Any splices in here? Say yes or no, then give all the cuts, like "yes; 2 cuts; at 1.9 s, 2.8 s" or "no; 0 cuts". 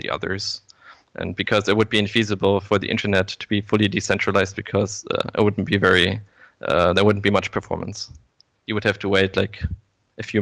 no; 0 cuts